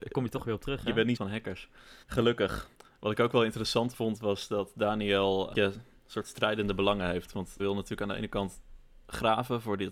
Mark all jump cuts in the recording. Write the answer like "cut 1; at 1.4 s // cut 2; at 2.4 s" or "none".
cut 1; at 1.2 s // cut 2; at 2.0 s // cut 3; at 5.5 s // cut 4; at 7.6 s